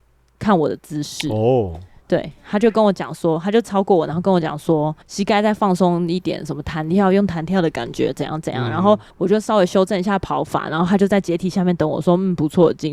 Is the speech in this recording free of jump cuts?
no; 2 cuts; at 5.0 s, 9.1 s

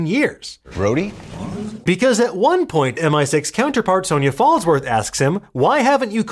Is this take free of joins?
no; 1 cut; at 3.0 s

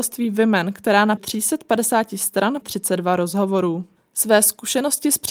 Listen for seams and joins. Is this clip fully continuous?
no; 2 cuts; at 1.2 s, 2.6 s

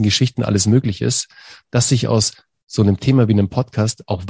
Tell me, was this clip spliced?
no; 0 cuts

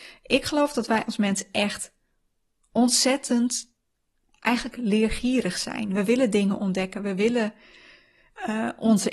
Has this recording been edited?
no; 0 cuts

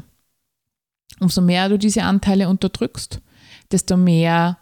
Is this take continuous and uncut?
yes; 0 cuts

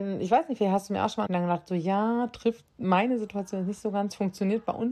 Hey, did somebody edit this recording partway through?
yes; 1 cut; at 1.3 s

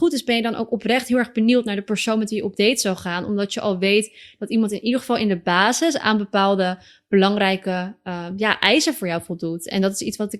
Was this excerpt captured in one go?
yes; 0 cuts

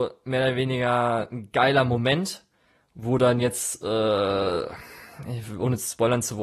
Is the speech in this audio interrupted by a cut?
no; 0 cuts

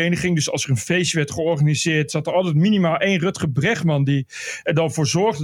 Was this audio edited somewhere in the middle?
no; 0 cuts

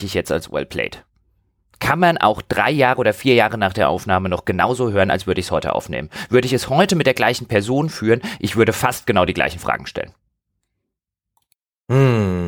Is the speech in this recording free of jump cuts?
yes; 0 cuts

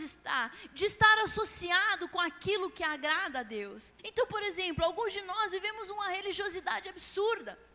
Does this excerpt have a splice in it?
yes; 1 cut; at 4.0 s

